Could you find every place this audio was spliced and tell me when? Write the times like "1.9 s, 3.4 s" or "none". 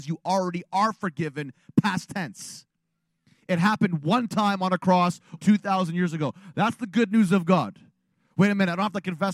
5.4 s